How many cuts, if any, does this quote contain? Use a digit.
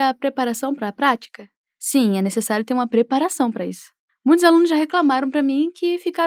0